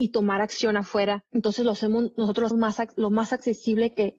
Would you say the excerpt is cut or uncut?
cut